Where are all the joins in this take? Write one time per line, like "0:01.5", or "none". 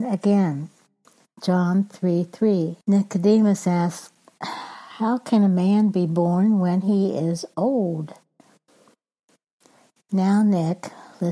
0:02.8